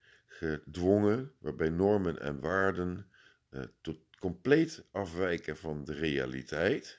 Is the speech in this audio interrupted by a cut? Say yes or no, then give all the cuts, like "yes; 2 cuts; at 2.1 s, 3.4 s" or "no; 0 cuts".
yes; 1 cut; at 1.4 s